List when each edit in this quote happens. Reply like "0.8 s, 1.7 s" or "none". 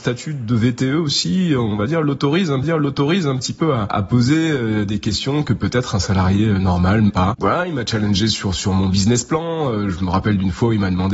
2.6 s, 7.1 s